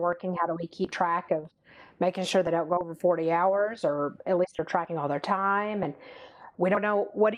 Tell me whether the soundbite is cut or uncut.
uncut